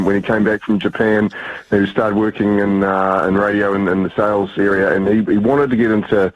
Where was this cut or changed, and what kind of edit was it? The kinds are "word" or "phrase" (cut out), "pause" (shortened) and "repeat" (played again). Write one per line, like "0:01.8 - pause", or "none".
none